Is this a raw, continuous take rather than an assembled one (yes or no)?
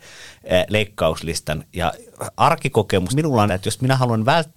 no